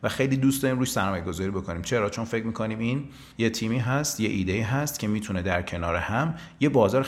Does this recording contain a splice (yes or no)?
yes